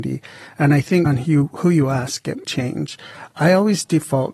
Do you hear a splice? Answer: yes; 2 cuts; at 1.1 s, 2.4 s

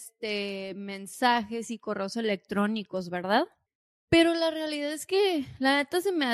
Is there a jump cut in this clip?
no; 0 cuts

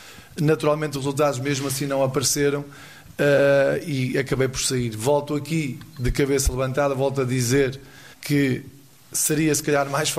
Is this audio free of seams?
no; 1 cut; at 8.1 s

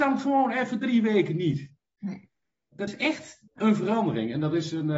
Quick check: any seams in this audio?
yes; 2 cuts; at 2.9 s, 3.5 s

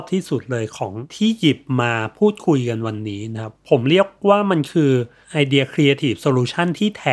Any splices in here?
no; 0 cuts

